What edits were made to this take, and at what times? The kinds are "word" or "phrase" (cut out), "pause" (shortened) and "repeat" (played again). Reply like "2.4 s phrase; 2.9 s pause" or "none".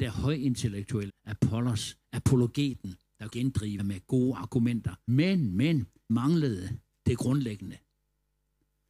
1.1 s word; 3.3 s word; 3.8 s word; 5.1 s word; 6.1 s word